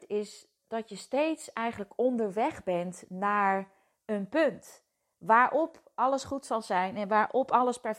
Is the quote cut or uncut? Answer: uncut